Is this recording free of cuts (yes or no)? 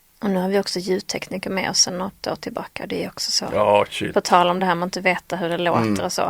yes